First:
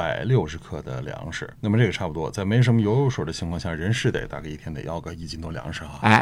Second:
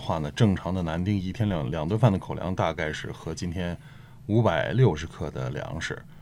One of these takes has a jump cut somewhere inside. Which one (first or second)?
first